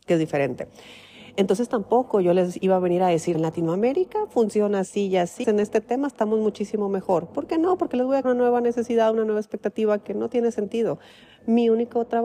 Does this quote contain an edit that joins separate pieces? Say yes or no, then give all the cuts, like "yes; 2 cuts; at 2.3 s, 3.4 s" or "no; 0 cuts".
yes; 3 cuts; at 3.3 s, 5.4 s, 8.2 s